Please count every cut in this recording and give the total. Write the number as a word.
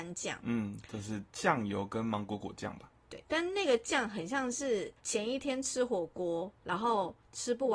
three